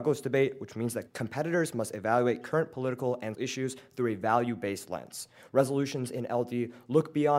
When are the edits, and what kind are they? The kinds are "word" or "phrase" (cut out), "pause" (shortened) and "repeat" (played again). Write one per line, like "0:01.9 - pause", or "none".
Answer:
0:01.1 - word
0:03.3 - word